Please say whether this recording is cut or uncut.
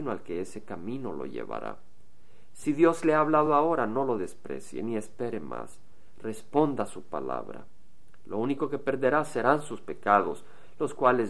uncut